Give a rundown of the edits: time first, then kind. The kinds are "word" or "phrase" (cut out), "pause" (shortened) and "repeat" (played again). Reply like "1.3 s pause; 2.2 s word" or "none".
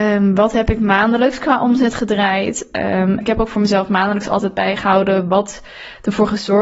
3.2 s word